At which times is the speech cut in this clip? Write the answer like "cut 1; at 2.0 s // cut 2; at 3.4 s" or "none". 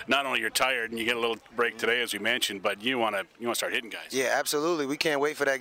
none